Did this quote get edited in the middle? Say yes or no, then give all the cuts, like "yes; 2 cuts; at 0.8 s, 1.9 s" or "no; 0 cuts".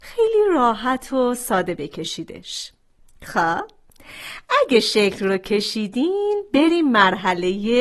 no; 0 cuts